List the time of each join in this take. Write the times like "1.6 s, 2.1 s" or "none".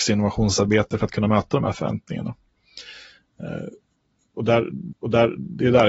4.9 s

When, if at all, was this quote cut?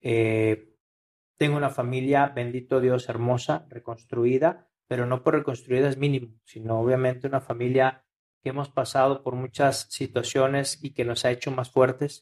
none

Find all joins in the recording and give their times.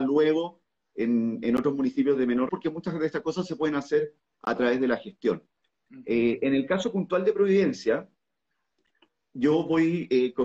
2.5 s

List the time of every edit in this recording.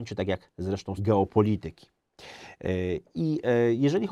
1.0 s

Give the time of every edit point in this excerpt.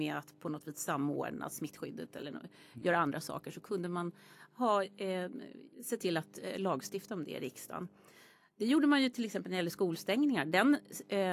5.7 s

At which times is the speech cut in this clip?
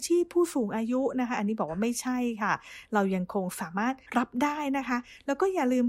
4.0 s

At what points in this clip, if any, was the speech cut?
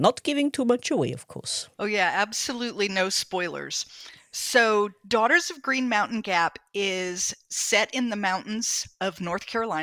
1.7 s

